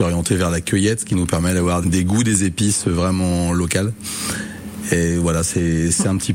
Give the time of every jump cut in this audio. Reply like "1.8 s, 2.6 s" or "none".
1.8 s